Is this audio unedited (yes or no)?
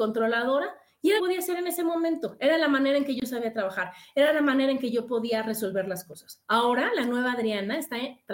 no